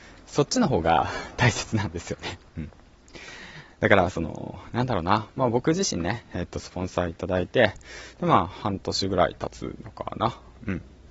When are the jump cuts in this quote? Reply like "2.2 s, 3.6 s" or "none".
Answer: 2.5 s